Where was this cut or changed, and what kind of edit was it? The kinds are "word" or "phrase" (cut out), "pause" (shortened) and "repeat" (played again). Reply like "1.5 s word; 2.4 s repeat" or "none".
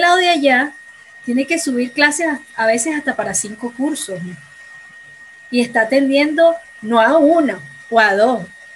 none